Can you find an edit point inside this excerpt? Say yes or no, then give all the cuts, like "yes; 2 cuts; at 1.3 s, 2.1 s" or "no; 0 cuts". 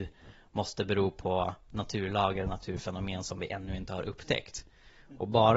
no; 0 cuts